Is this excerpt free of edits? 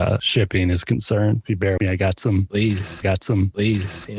no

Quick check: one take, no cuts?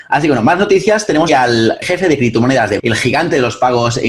no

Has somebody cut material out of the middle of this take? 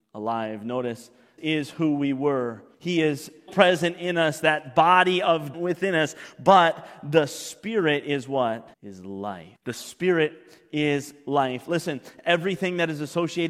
yes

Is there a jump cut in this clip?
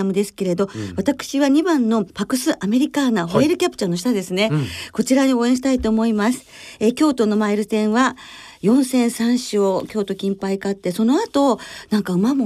yes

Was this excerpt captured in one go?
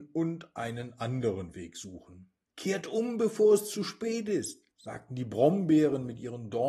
no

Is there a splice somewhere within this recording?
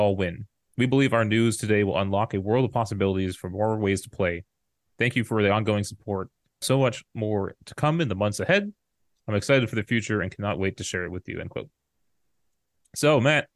yes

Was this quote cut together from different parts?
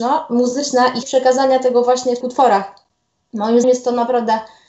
yes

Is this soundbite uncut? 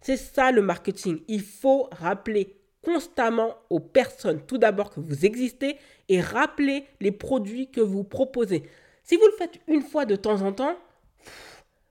yes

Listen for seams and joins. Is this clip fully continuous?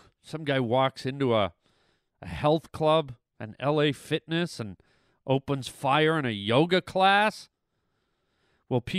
yes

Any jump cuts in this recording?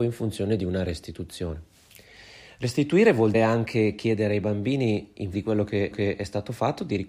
yes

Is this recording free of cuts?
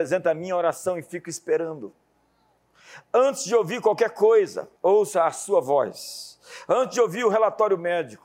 no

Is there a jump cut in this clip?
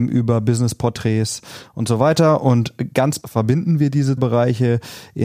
yes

